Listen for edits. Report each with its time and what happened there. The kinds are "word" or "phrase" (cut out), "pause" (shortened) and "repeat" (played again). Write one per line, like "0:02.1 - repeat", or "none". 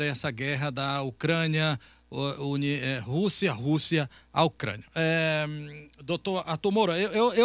none